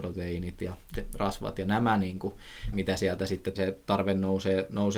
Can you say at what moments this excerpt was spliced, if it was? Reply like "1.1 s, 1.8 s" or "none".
0.9 s, 2.7 s, 3.5 s